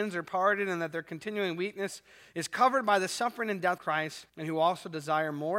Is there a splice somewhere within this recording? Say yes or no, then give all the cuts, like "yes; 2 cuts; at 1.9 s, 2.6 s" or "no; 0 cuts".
yes; 2 cuts; at 3.8 s, 4.3 s